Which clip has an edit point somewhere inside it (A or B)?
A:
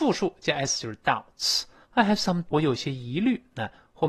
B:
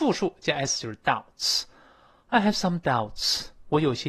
A